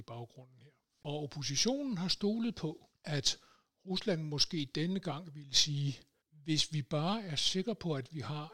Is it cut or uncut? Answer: uncut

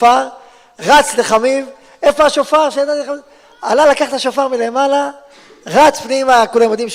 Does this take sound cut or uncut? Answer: uncut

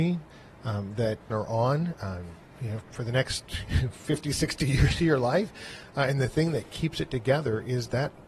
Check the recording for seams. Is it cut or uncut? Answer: cut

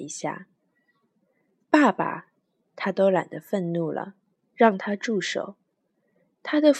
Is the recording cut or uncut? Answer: uncut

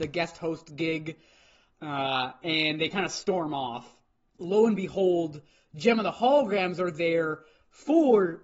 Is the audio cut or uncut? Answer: uncut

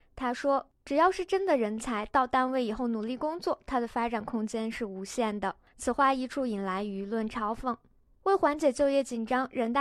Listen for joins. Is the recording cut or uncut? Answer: uncut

